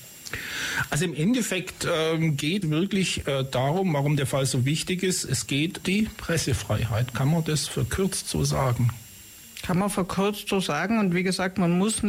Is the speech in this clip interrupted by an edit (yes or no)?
yes